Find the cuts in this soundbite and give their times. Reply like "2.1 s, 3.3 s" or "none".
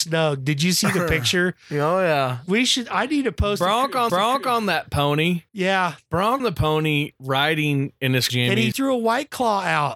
4.1 s, 5.5 s, 6.4 s, 7.2 s, 8.3 s, 8.7 s